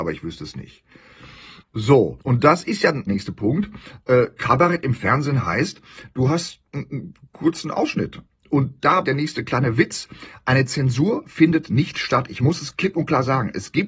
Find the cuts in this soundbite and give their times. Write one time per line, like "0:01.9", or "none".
0:02.2
0:03.1
0:09.0